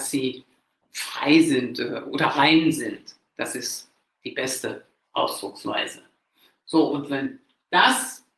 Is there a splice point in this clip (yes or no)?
no